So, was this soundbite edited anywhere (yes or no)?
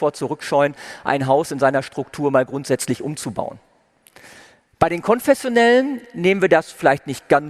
no